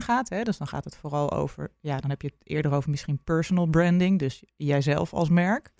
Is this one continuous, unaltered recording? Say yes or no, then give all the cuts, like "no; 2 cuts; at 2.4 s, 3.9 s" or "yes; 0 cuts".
yes; 0 cuts